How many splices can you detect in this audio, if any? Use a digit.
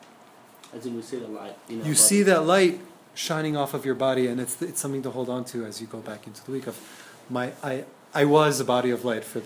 0